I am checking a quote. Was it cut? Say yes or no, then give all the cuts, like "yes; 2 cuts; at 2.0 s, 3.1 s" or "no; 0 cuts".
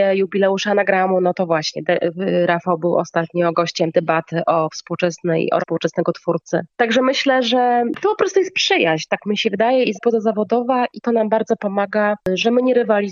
yes; 4 cuts; at 3.9 s, 5.6 s, 9.9 s, 11.0 s